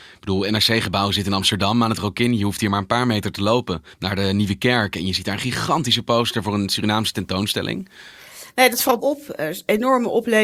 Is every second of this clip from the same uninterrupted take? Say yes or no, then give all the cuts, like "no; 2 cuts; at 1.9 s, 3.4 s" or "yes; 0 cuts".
no; 2 cuts; at 3.9 s, 9.0 s